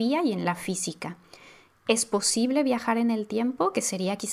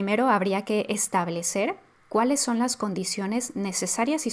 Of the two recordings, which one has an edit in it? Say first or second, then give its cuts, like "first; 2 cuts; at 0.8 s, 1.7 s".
second; 1 cut; at 2.0 s